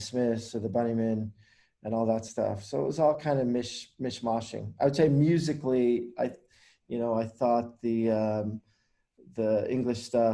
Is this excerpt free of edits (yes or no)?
yes